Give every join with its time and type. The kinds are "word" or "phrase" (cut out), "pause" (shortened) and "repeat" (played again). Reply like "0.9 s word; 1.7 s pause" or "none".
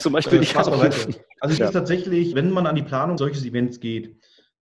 1.6 s word; 2.3 s word; 3.2 s word